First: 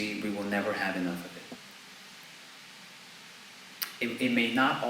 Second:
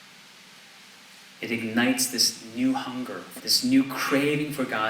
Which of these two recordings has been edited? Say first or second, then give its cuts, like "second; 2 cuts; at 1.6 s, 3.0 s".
second; 1 cut; at 3.4 s